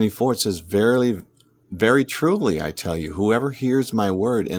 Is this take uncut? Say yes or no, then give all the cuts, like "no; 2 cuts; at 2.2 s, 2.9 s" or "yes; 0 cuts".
yes; 0 cuts